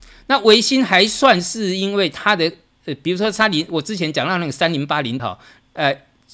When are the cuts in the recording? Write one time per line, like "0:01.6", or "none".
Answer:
0:05.2